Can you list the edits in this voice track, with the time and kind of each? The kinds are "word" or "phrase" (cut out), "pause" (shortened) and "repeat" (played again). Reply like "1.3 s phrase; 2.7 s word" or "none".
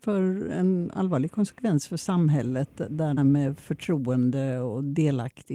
3.2 s word